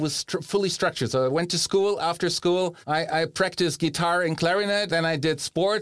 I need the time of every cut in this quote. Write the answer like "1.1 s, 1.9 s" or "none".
2.8 s, 4.9 s